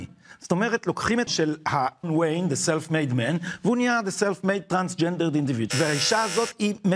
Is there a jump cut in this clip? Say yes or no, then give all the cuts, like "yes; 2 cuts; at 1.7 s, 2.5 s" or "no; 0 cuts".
yes; 3 cuts; at 1.3 s, 2.0 s, 5.7 s